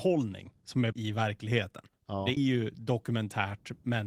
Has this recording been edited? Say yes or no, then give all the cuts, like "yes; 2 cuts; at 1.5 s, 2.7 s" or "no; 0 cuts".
yes; 3 cuts; at 0.9 s, 2.0 s, 2.4 s